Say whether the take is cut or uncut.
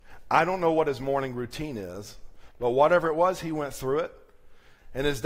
uncut